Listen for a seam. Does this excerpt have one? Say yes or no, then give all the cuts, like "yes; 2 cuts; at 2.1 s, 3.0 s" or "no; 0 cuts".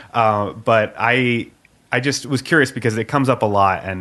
no; 0 cuts